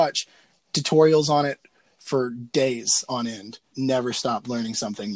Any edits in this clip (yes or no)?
yes